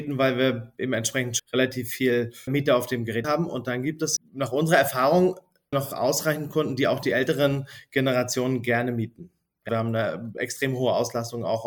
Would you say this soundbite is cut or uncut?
cut